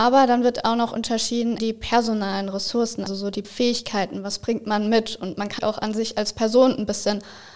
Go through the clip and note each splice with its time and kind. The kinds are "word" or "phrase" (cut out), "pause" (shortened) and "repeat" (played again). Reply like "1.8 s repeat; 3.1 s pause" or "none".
1.6 s word; 3.1 s word; 3.4 s word; 5.6 s word